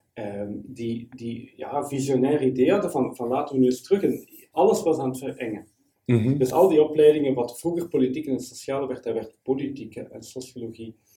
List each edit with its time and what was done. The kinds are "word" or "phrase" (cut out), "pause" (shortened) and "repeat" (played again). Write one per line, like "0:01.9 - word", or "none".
none

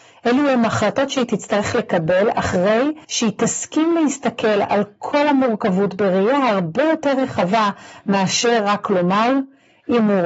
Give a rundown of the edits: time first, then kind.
0:03.0 - pause

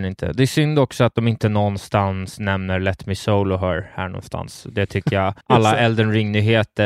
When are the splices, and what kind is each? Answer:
0:05.4 - pause

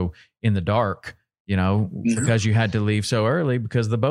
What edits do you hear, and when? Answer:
none

